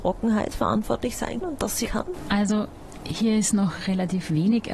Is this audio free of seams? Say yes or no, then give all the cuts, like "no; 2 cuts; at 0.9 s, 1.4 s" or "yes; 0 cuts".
no; 2 cuts; at 1.4 s, 1.9 s